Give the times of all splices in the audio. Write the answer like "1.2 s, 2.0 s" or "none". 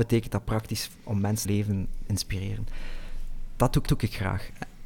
1.4 s, 2.1 s, 3.9 s